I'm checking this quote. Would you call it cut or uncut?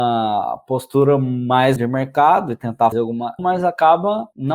cut